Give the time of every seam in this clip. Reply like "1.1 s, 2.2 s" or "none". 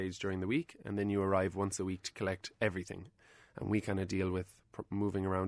none